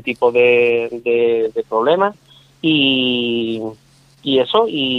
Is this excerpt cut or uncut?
uncut